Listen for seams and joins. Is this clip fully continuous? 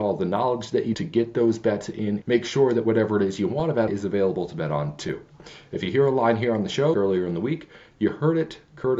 no; 4 cuts; at 0.9 s, 2.2 s, 3.9 s, 6.9 s

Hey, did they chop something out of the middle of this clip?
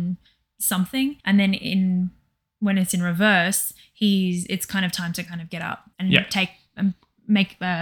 yes; 2 cuts; at 1.2 s, 5.9 s

